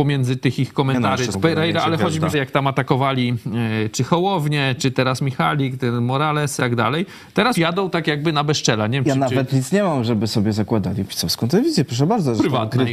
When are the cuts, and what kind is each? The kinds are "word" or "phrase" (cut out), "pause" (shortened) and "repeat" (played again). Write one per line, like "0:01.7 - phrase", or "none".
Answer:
0:01.3 - phrase
0:02.3 - phrase
0:06.6 - word
0:07.5 - word